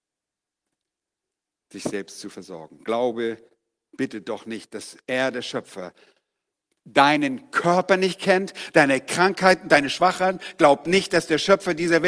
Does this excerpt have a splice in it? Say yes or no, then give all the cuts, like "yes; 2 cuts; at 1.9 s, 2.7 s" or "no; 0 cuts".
no; 0 cuts